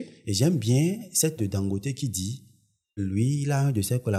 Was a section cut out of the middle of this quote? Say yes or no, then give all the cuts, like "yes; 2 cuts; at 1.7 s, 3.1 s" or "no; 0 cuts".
yes; 2 cuts; at 1.4 s, 3.0 s